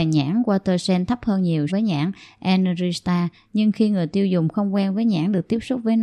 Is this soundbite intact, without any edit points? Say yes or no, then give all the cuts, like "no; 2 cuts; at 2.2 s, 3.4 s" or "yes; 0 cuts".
no; 1 cut; at 1.7 s